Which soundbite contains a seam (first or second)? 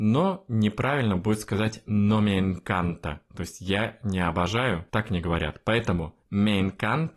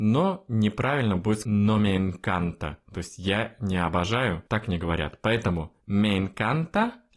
second